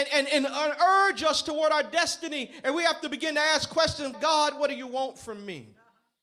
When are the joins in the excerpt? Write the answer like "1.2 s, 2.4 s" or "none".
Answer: 4.1 s

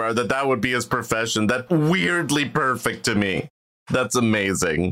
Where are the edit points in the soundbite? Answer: 1.7 s

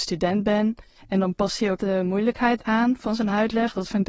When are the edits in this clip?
1.8 s

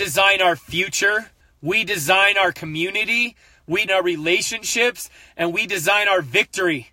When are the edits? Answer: 1.4 s, 3.9 s

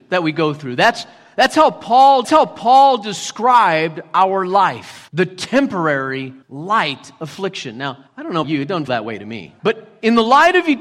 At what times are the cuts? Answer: 2.2 s, 5.1 s, 6.4 s, 8.1 s, 8.4 s, 8.9 s, 9.6 s

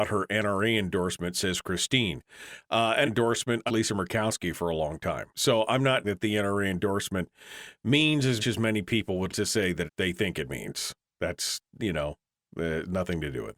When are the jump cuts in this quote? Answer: 3.1 s, 3.7 s, 5.3 s, 6.0 s, 8.4 s, 9.3 s, 9.9 s

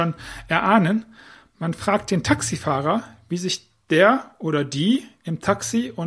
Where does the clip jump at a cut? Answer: none

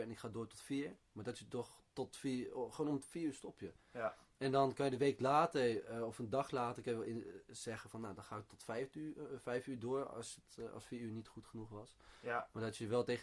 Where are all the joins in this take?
none

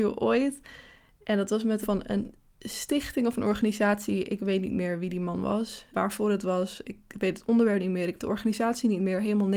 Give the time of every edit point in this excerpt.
1.8 s, 5.9 s, 8.2 s

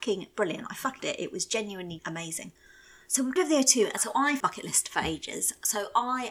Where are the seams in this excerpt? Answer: 1.0 s, 2.0 s, 3.4 s, 4.0 s, 4.4 s

